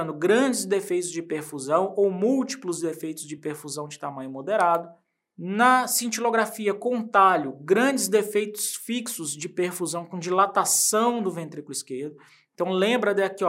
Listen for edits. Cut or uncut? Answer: uncut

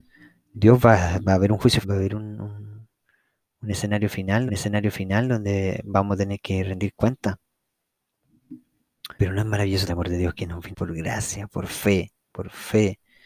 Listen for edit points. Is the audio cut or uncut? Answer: cut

